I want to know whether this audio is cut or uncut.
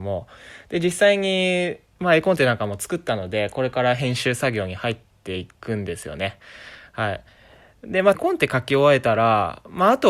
cut